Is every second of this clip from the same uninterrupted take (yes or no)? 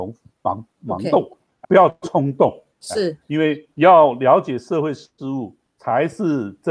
no